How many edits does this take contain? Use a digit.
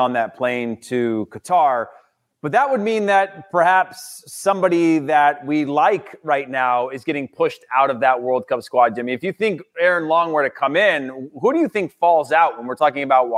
0